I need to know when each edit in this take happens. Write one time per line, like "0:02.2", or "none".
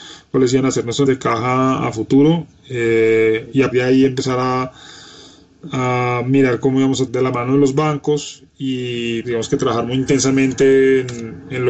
0:01.1
0:03.7
0:07.1
0:09.2